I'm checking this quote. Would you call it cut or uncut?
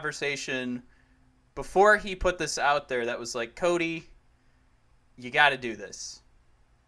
uncut